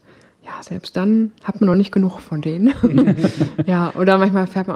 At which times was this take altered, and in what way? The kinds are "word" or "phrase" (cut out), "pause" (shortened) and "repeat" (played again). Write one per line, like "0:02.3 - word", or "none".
none